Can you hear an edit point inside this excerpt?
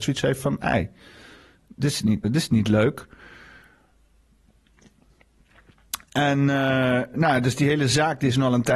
yes; 2 cuts; at 2.2 s, 7.1 s

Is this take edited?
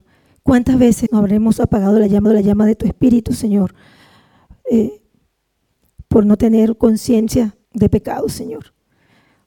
yes; 3 cuts; at 1.1 s, 2.2 s, 7.6 s

